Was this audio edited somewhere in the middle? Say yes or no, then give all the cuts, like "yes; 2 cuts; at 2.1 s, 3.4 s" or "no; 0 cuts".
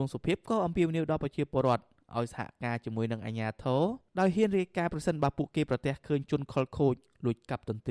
no; 0 cuts